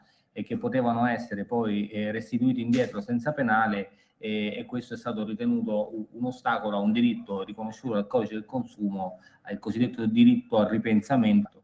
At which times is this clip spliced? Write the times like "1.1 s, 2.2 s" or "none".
none